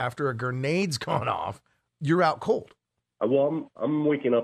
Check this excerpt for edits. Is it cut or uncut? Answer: cut